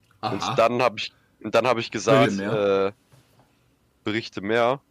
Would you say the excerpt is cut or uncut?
cut